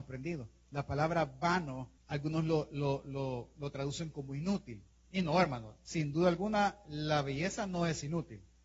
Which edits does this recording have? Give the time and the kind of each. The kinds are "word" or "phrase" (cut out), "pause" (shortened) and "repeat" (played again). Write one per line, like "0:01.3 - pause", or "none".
0:02.0 - pause